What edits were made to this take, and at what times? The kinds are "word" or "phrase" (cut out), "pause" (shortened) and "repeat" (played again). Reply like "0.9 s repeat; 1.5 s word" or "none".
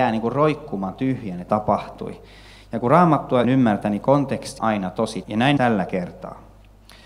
1.5 s phrase; 3.4 s word; 4.6 s word; 5.2 s word; 5.6 s word